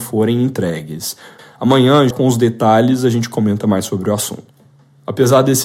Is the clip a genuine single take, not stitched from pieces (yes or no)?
no